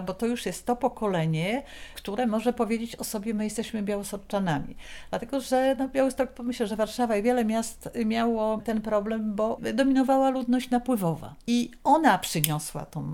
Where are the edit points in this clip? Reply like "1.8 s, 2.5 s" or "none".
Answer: none